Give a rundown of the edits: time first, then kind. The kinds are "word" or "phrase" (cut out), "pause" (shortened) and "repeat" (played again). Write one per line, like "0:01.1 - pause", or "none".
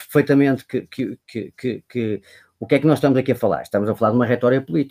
none